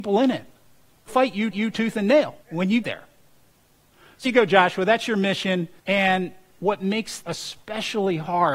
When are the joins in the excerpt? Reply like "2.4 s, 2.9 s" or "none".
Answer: 1.1 s, 1.5 s, 2.4 s, 2.8 s, 4.2 s, 5.8 s, 7.2 s